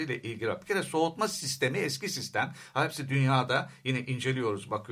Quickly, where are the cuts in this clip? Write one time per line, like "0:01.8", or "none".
none